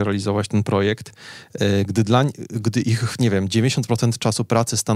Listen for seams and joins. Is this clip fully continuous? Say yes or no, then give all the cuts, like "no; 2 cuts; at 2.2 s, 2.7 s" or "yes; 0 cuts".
yes; 0 cuts